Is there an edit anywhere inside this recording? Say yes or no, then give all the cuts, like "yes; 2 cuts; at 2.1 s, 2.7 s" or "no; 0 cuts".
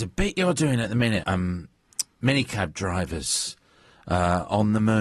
yes; 1 cut; at 1.2 s